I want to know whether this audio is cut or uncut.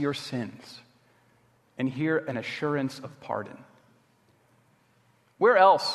uncut